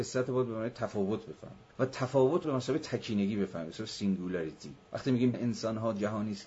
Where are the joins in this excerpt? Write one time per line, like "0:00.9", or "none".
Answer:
0:01.7
0:02.4
0:04.8
0:05.3